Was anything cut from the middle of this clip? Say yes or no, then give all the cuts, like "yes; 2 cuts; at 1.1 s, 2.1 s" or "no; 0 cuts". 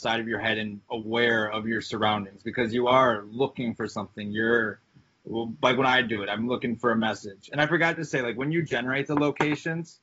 no; 0 cuts